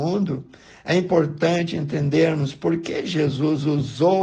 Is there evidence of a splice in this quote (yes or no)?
no